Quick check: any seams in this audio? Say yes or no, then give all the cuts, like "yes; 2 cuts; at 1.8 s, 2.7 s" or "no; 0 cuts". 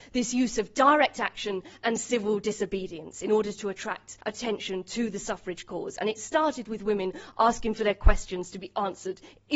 yes; 1 cut; at 4.2 s